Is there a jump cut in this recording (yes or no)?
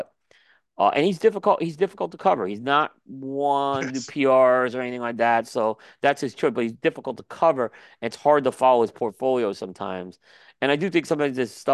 no